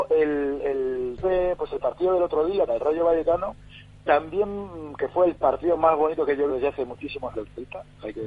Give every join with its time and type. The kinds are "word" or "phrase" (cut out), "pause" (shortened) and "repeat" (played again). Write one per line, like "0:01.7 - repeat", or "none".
0:01.2 - word
0:02.7 - word
0:06.5 - word
0:07.3 - word

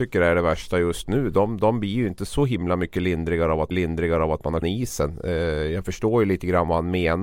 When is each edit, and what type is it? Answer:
0:03.7 - repeat
0:04.6 - word

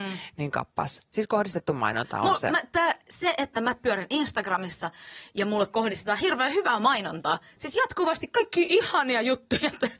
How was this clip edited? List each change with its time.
none

